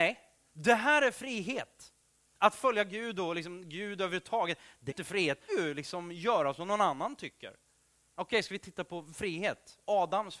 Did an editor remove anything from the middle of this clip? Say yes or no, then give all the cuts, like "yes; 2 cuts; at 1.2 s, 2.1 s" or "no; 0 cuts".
yes; 2 cuts; at 4.9 s, 5.5 s